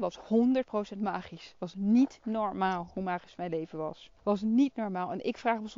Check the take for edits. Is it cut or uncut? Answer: cut